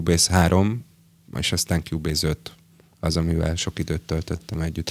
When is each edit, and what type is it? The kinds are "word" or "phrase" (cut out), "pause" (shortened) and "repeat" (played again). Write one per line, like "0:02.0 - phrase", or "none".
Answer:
none